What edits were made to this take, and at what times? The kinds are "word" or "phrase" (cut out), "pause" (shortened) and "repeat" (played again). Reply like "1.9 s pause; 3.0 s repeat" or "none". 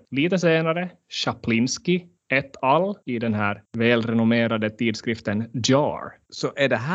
none